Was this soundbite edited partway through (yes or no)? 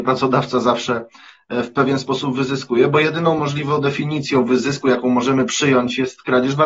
no